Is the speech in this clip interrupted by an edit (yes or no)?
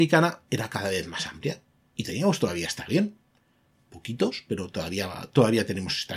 no